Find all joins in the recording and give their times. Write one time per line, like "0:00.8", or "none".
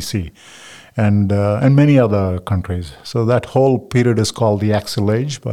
none